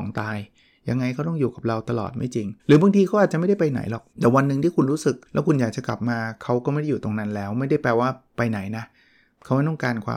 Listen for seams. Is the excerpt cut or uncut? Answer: cut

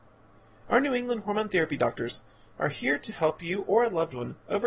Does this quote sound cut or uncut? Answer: uncut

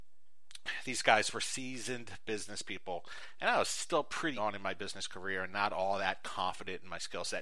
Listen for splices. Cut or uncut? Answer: cut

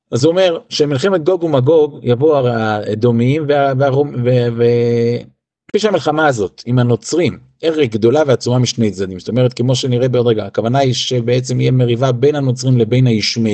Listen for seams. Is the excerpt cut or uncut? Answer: uncut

